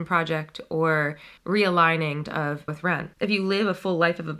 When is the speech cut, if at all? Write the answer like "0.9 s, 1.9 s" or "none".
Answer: 1.4 s, 2.2 s, 2.7 s, 3.1 s